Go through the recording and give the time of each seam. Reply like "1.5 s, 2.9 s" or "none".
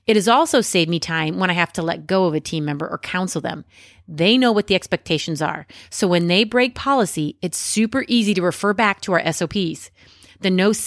none